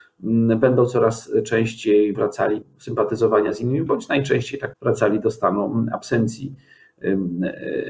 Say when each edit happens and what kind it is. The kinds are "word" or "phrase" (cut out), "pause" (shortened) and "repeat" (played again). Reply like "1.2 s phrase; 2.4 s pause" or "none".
2.1 s word; 2.6 s word; 3.9 s word; 4.7 s word